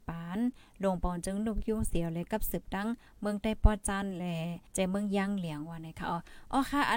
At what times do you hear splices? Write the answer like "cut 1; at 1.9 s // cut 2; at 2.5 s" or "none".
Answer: cut 1; at 4.7 s